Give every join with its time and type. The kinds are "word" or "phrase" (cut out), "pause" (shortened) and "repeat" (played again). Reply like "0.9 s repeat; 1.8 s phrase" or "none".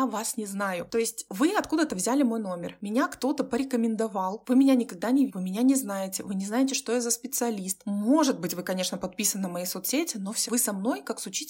5.3 s word; 10.5 s word